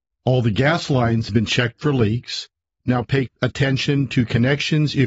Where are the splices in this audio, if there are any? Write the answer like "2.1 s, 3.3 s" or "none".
1.3 s, 3.3 s